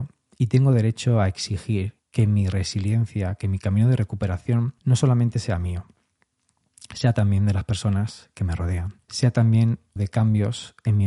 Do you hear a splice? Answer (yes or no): yes